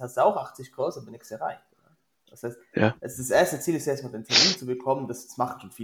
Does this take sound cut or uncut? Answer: uncut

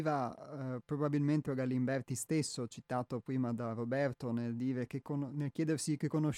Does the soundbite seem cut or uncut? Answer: cut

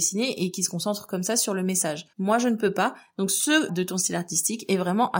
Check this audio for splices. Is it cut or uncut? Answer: cut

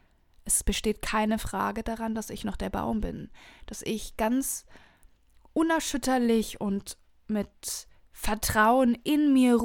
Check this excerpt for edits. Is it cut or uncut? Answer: uncut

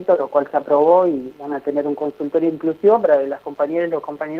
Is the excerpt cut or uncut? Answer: uncut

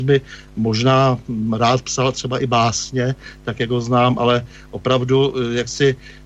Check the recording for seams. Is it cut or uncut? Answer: uncut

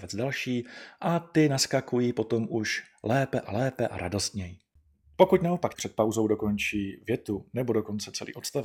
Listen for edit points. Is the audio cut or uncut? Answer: cut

